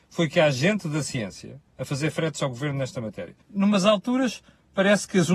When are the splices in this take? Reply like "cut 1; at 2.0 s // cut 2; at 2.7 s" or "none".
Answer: cut 1; at 1.7 s // cut 2; at 3.4 s